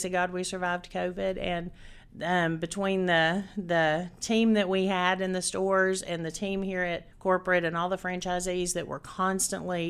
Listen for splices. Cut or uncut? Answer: cut